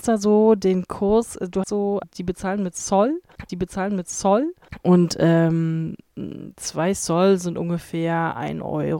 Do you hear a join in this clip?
yes; 3 cuts; at 1.6 s, 2.0 s, 3.5 s

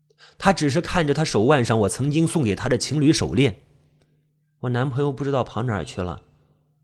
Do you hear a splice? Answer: no; 0 cuts

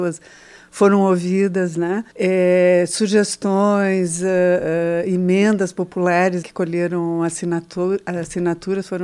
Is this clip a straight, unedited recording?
no; 2 cuts; at 2.1 s, 6.4 s

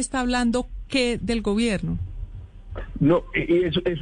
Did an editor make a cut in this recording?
yes; 1 cut; at 1.2 s

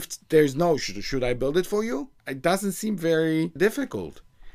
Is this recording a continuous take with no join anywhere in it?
no; 1 cut; at 3.6 s

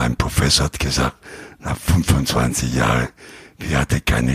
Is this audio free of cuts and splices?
yes; 0 cuts

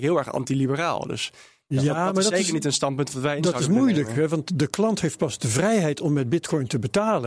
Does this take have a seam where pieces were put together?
no; 0 cuts

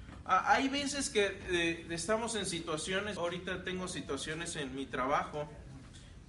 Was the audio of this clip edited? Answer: yes; 1 cut; at 3.2 s

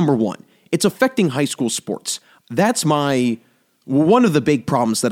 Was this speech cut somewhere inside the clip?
no; 0 cuts

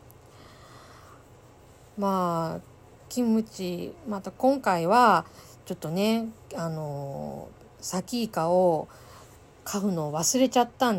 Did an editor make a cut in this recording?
no; 0 cuts

